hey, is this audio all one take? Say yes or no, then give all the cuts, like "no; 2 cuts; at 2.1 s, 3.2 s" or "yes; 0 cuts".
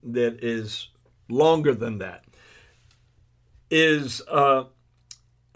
yes; 0 cuts